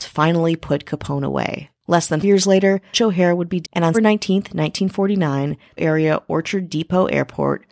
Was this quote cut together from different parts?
yes; 5 cuts; at 2.2 s, 2.9 s, 3.6 s, 3.9 s, 5.8 s

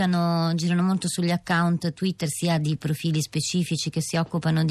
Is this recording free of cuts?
yes; 0 cuts

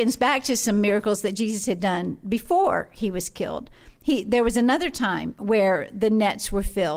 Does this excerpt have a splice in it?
no; 0 cuts

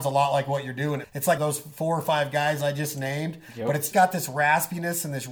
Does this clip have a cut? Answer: yes; 3 cuts; at 1.0 s, 1.4 s, 3.9 s

